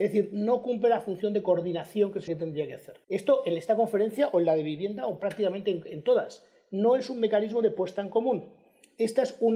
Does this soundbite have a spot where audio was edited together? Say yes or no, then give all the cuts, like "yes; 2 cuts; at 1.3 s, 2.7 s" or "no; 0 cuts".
yes; 2 cuts; at 2.3 s, 3.0 s